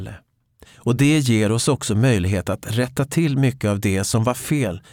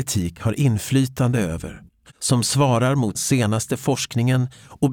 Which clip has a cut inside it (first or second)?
second